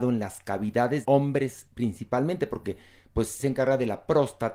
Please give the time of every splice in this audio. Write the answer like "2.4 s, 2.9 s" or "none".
1.0 s, 3.4 s